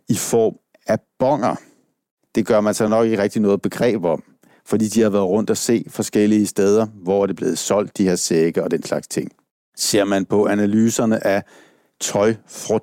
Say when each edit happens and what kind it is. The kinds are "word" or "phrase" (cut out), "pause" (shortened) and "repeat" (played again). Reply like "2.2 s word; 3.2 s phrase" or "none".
none